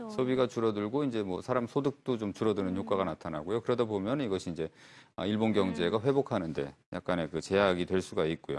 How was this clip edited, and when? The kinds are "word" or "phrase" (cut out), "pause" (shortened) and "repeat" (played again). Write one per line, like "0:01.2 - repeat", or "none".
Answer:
none